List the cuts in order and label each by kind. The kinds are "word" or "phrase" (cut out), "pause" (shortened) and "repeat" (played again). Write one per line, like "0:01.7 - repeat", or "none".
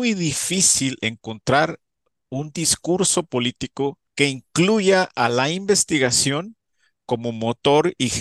0:04.1 - pause